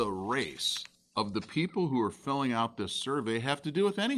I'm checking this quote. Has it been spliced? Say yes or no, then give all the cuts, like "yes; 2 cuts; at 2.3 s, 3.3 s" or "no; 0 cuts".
no; 0 cuts